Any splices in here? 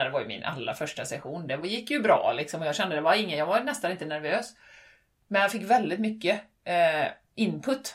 no; 0 cuts

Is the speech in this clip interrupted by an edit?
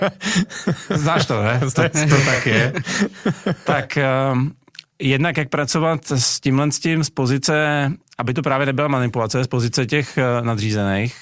no; 0 cuts

